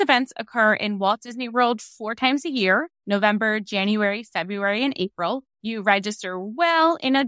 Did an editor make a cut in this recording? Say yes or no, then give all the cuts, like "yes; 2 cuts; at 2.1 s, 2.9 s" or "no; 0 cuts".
yes; 1 cut; at 5.5 s